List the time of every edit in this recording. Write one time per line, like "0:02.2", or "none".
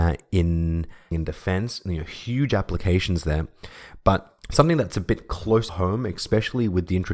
0:01.1
0:04.4
0:05.7